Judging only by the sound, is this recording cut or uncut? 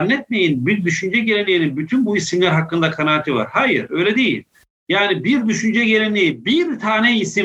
uncut